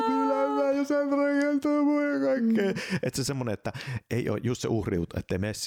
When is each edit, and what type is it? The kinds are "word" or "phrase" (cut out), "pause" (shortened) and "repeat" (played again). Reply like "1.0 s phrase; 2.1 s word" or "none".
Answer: none